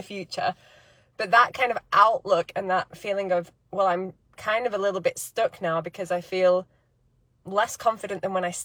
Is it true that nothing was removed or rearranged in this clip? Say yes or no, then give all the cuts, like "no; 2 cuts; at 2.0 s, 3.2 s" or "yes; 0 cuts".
yes; 0 cuts